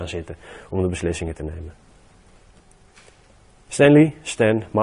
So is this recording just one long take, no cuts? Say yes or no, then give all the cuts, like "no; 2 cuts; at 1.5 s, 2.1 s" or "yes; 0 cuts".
yes; 0 cuts